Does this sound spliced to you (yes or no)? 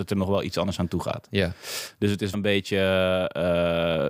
yes